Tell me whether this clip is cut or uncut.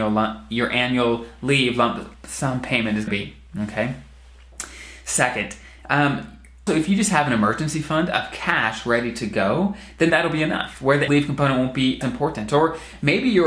cut